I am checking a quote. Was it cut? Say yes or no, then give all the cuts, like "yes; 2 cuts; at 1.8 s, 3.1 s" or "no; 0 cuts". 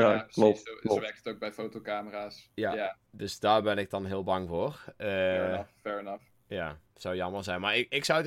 yes; 1 cut; at 6.9 s